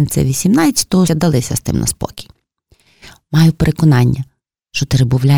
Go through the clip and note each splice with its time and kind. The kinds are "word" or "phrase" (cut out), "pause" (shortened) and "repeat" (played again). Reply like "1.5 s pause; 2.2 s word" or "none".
1.1 s word

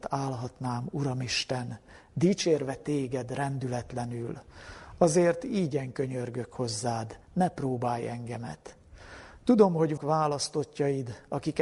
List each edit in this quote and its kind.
7.2 s pause; 10.0 s word

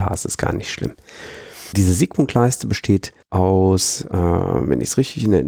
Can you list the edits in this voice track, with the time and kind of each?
3.2 s pause

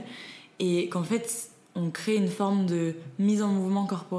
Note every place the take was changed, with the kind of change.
none

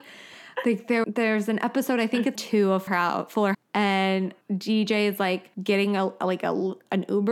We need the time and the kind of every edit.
1.0 s word; 2.4 s word; 2.9 s word; 3.5 s word; 4.4 s pause; 5.5 s pause

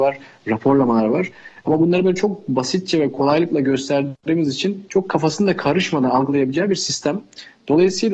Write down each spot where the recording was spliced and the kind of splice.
none

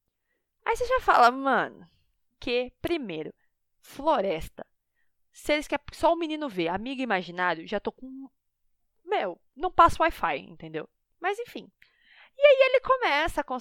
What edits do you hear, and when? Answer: none

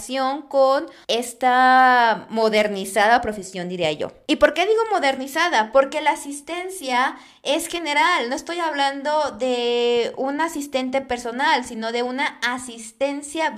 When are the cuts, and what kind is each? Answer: none

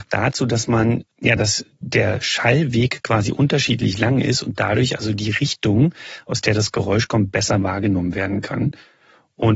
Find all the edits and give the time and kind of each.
none

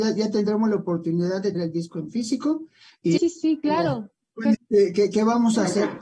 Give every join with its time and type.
1.5 s word; 3.2 s word; 4.5 s word

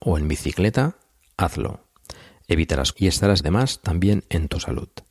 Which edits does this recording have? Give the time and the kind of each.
2.9 s word; 3.4 s word

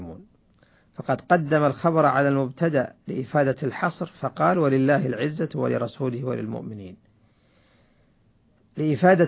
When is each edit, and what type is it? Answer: none

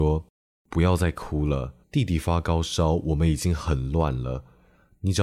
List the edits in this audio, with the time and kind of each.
1.8 s pause

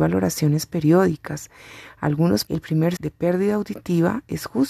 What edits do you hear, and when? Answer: 2.5 s word; 3.0 s word

